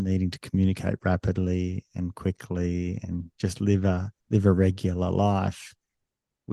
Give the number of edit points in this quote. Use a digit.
2